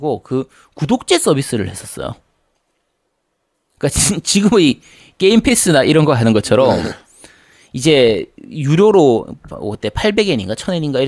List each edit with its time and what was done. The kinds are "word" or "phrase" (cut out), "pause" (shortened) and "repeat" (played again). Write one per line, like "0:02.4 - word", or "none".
none